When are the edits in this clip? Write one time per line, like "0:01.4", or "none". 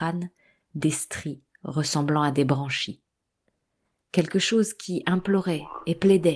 none